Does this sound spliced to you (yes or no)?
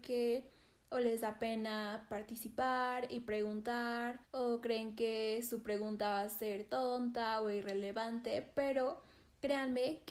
yes